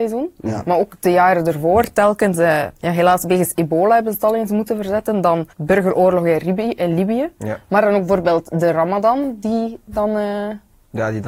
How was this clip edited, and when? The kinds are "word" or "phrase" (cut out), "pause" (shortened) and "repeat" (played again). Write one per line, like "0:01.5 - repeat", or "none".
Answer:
0:02.8 - pause
0:05.5 - pause